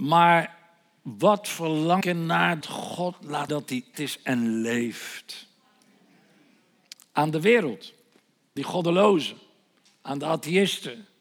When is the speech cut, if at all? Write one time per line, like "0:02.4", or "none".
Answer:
0:02.0
0:02.6
0:03.5
0:03.9
0:08.6